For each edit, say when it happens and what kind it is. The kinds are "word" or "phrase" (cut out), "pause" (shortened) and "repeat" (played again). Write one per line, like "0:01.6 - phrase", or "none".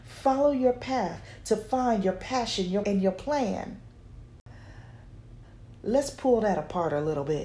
0:02.8 - phrase

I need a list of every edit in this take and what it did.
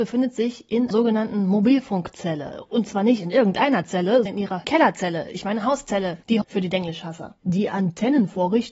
0:00.9 - word
0:04.3 - word
0:04.6 - word
0:06.4 - word

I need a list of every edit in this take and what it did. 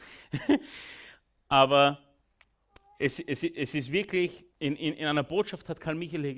0:04.5 - pause

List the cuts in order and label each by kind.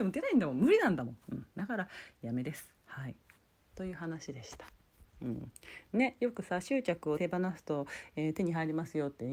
0:07.2 - word

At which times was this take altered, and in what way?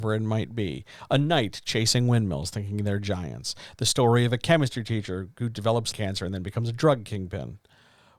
0:05.9 - word

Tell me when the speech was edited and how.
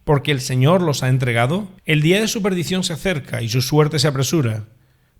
0:01.8 - pause

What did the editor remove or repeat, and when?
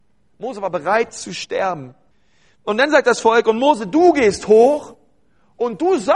0:02.1 - pause

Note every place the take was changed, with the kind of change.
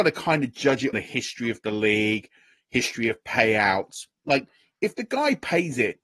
0:00.9 - word

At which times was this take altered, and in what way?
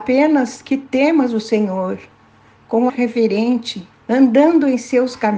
0:02.9 - word
0:03.9 - pause

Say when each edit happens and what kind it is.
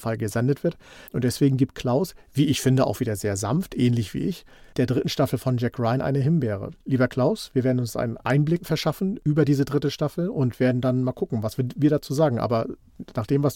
0:01.1 - pause
0:06.8 - pause
0:08.6 - word

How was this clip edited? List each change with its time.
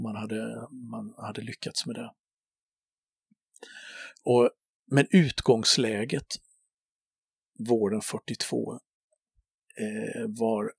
none

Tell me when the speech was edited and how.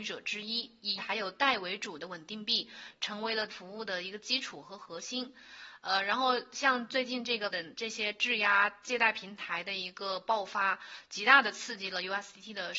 0:01.0 - word
0:03.5 - word
0:07.5 - word

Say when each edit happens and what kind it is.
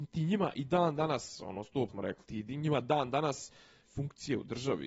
0:01.9 - word
0:03.8 - word

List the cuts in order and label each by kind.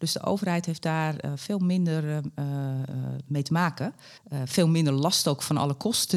0:04.2 - pause

